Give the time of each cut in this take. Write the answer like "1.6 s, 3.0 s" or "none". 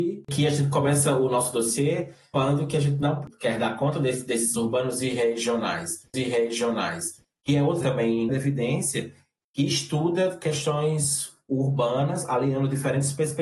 4.5 s, 6.1 s, 7.8 s, 8.3 s